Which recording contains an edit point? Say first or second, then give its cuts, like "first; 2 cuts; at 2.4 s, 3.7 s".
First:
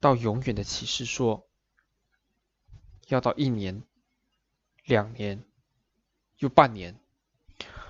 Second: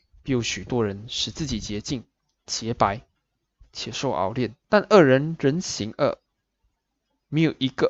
second; 2 cuts; at 2.2 s, 4.6 s